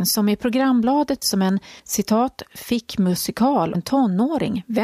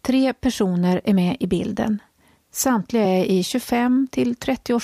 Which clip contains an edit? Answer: first; 3 cuts; at 1.2 s, 1.8 s, 3.7 s

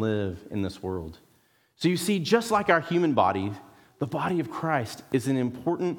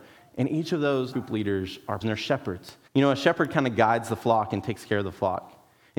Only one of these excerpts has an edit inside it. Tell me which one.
second; 3 cuts; at 1.1 s, 2.0 s, 2.9 s

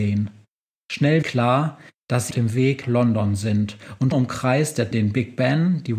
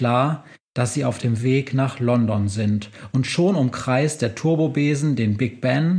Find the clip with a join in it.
first; 5 cuts; at 1.2 s, 2.3 s, 2.8 s, 4.1 s, 4.9 s

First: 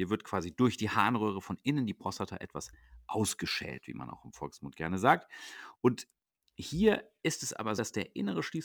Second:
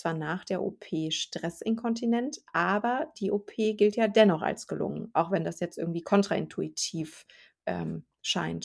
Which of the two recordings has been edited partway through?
first; 1 cut; at 7.8 s

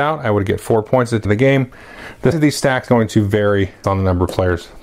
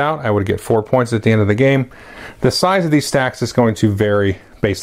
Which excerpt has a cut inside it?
first; 4 cuts; at 1.2 s, 2.3 s, 2.9 s, 3.8 s

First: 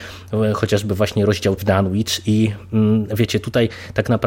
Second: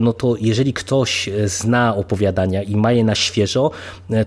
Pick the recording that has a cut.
first; 1 cut; at 1.6 s

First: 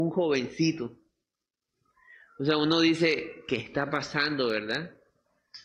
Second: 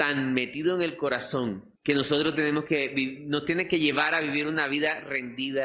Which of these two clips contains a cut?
second; 1 cut; at 1.8 s

